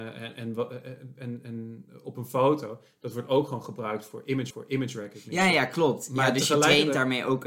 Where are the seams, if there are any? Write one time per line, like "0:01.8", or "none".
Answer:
0:04.5